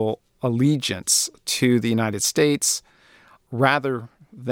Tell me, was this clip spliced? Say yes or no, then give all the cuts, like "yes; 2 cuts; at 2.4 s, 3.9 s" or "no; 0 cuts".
no; 0 cuts